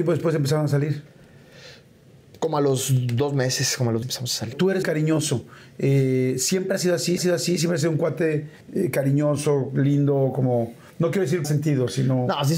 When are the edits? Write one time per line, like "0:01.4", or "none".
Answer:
0:04.0
0:04.8
0:07.2
0:08.6
0:11.4